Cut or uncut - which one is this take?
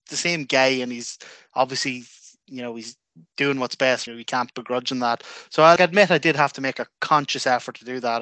cut